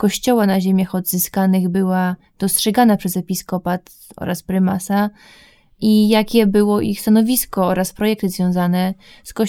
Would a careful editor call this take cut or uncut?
uncut